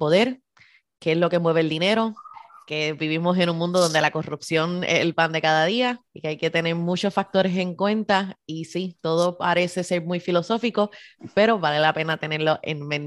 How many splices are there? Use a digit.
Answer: 1